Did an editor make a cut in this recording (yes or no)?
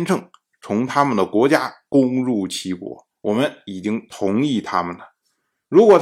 yes